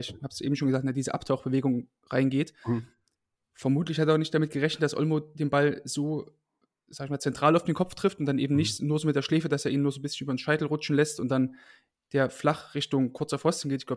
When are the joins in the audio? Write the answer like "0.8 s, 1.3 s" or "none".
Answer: none